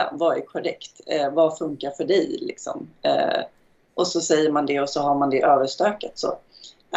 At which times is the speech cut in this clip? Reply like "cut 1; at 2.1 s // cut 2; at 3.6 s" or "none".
none